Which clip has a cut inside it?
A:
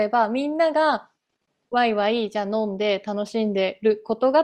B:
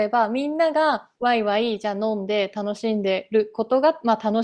B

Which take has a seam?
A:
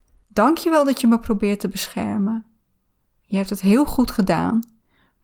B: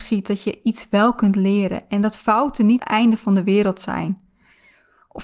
B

